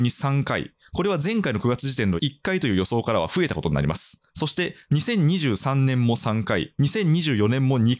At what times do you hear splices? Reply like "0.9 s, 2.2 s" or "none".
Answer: 4.3 s